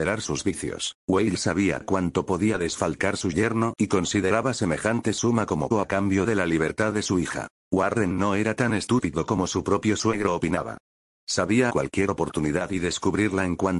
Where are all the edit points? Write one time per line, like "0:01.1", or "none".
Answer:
0:01.0
0:05.7
0:11.7